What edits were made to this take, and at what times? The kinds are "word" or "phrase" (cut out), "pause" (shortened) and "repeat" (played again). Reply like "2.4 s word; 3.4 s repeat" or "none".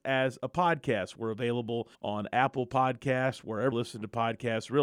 1.9 s pause; 3.7 s word